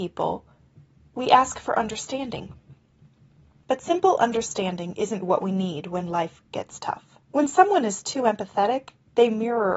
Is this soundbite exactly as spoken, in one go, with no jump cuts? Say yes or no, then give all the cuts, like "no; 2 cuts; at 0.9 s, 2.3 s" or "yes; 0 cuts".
no; 2 cuts; at 5.2 s, 7.2 s